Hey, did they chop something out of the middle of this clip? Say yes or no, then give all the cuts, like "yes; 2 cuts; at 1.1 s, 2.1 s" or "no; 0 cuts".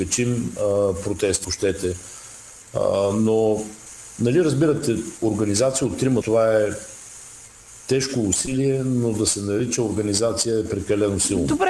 yes; 2 cuts; at 1.4 s, 6.2 s